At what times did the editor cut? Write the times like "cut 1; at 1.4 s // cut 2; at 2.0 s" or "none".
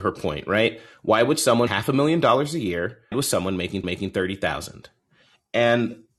cut 1; at 1.7 s // cut 2; at 3.1 s // cut 3; at 3.8 s